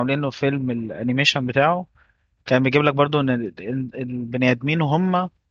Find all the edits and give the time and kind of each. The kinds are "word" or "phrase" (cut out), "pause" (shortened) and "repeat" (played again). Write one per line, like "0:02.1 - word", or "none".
none